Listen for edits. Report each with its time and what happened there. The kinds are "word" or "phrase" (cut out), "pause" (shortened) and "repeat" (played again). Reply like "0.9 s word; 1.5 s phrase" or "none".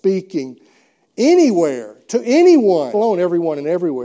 2.9 s word